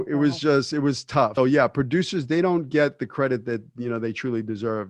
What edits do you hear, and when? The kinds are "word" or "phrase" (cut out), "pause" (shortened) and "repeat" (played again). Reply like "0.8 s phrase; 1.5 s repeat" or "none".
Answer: 1.4 s word